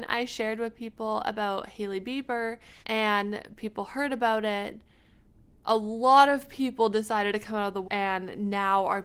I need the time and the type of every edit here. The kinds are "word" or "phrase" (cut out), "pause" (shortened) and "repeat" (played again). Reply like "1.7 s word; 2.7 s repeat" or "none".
2.8 s pause; 7.8 s word